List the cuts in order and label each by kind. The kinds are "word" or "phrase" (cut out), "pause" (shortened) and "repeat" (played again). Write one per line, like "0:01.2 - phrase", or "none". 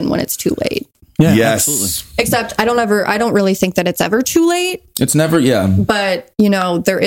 none

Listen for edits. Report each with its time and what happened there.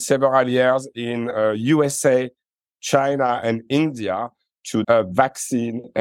0:04.8 - word

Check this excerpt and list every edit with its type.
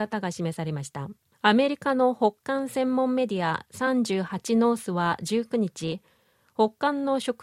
0:01.3 - pause

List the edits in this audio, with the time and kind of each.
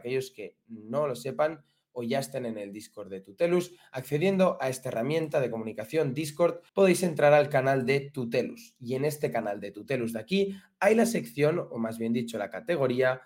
0:06.7 - pause

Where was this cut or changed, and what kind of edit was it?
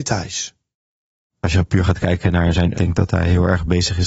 0:02.7 - word

